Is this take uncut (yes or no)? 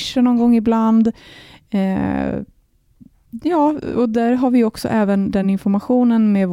yes